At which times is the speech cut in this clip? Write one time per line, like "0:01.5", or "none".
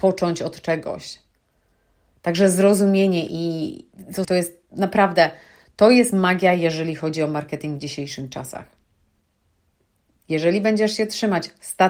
0:04.2